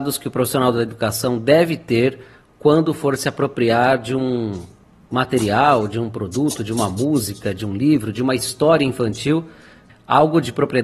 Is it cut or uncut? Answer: uncut